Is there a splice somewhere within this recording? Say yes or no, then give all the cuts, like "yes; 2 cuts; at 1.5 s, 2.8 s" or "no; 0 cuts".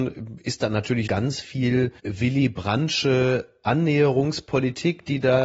yes; 2 cuts; at 1.1 s, 2.0 s